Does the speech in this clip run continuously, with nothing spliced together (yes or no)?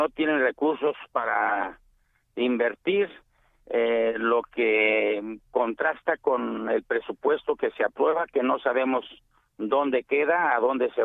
yes